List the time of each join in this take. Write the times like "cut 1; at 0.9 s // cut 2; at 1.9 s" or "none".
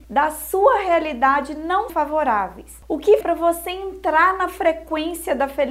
cut 1; at 1.9 s // cut 2; at 3.2 s